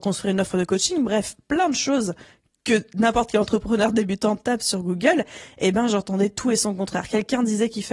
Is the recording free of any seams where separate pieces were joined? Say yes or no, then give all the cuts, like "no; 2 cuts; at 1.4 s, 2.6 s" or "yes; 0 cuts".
yes; 0 cuts